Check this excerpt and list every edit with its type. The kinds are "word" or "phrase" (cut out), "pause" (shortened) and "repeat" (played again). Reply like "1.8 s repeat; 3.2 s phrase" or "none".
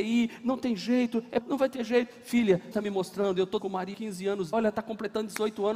1.4 s word; 2.7 s word; 3.6 s word; 3.9 s word; 4.5 s word